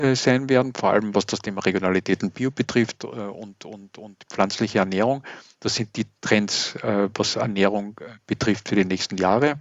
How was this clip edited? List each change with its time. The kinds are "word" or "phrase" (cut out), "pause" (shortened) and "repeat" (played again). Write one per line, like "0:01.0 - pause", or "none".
none